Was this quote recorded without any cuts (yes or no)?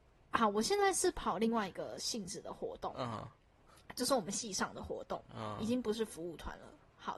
yes